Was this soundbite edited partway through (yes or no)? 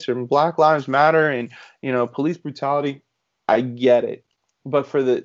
no